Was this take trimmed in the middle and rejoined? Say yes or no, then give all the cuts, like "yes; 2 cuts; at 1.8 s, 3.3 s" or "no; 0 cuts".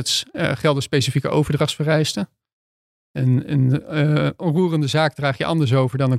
no; 0 cuts